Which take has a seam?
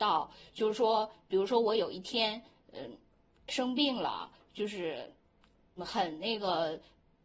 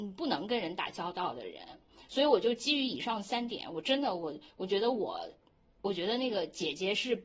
first; 1 cut; at 5.8 s

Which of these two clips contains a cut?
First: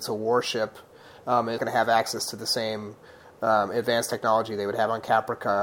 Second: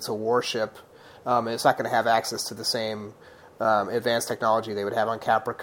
first; 1 cut; at 1.6 s

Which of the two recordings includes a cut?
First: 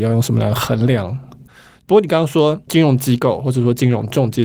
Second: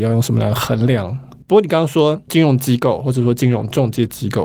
second; 1 cut; at 1.4 s

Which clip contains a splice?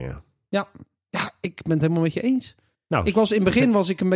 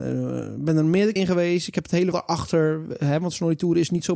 second; 2 cuts; at 1.2 s, 2.1 s

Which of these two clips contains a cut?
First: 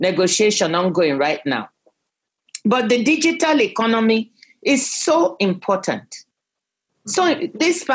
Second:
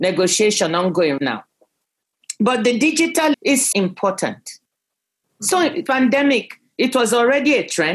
second; 4 cuts; at 1.2 s, 3.3 s, 3.7 s, 5.9 s

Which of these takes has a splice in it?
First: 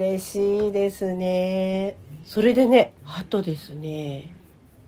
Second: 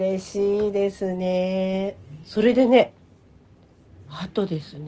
first; 1 cut; at 3.0 s

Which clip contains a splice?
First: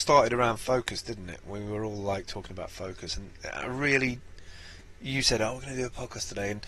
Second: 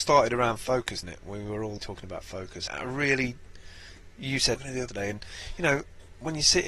second; 5 cuts; at 1.0 s, 1.8 s, 2.7 s, 4.6 s, 4.9 s

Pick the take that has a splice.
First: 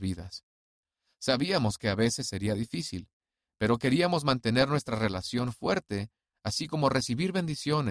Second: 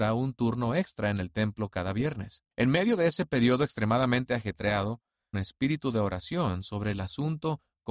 second; 2 cuts; at 2.5 s, 5.3 s

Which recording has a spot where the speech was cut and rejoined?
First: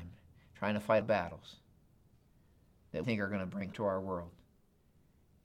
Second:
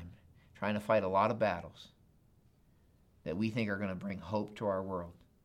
first; 3 cuts; at 1.0 s, 3.0 s, 3.7 s

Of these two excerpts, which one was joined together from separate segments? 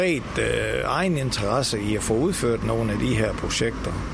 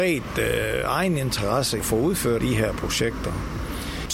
second; 2 cuts; at 1.8 s, 2.4 s

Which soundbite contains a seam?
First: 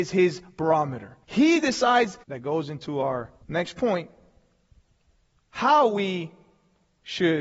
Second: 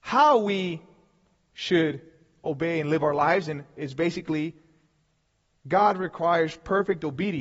first; 3 cuts; at 1.2 s, 2.2 s, 3.4 s

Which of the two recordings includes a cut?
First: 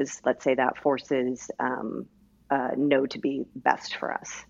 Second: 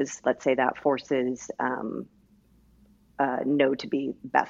first; 1 cut; at 2.2 s

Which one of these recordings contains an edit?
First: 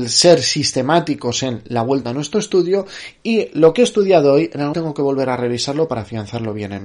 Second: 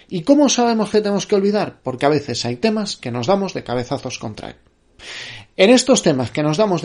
first; 1 cut; at 4.7 s

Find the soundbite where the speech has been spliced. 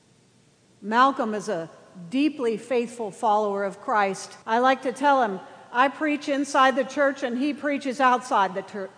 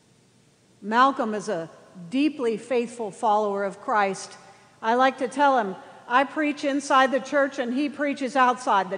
first; 1 cut; at 4.4 s

